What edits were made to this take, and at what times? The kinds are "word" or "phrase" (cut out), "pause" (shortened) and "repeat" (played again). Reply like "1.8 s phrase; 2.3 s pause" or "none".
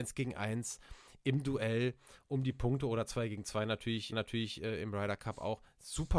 4.1 s repeat